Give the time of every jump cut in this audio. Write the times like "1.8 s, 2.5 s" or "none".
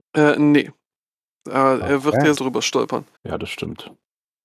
2.4 s, 3.2 s